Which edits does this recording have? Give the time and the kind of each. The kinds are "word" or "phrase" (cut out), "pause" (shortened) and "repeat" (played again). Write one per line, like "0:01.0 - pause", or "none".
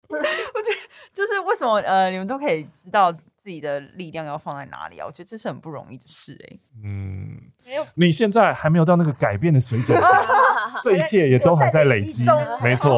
none